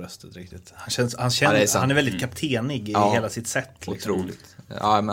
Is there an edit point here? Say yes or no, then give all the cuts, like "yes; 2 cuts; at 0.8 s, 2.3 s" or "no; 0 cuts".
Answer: no; 0 cuts